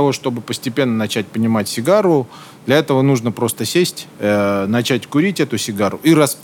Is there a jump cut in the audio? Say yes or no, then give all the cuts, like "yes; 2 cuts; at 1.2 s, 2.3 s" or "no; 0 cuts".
yes; 1 cut; at 4.1 s